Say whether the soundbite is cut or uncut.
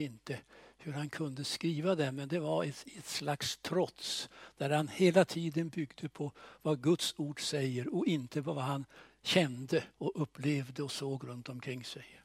cut